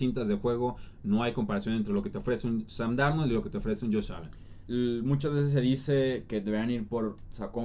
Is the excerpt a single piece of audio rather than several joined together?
yes; 0 cuts

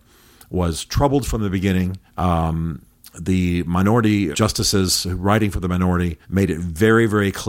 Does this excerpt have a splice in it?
yes; 3 cuts; at 2.1 s, 4.3 s, 6.2 s

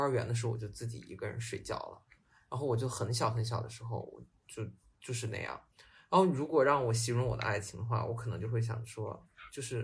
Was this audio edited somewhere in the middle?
no; 0 cuts

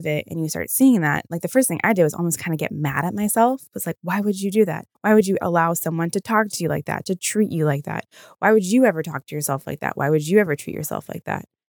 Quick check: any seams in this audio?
yes; 2 cuts; at 4.9 s, 5.4 s

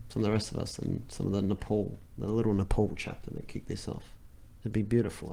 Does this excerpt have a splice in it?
no; 0 cuts

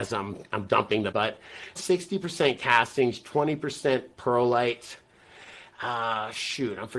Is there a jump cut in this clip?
yes; 2 cuts; at 1.1 s, 1.8 s

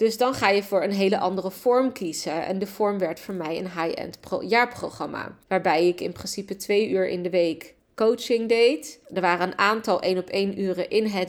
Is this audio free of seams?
no; 2 cuts; at 5.4 s, 9.0 s

